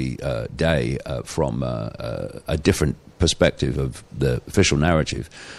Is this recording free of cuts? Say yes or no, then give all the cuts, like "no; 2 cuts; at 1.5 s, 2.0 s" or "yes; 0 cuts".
no; 1 cut; at 4.1 s